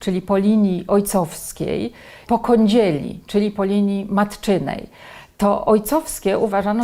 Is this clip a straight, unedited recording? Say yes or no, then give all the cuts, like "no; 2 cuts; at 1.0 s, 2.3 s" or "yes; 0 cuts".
no; 1 cut; at 2.3 s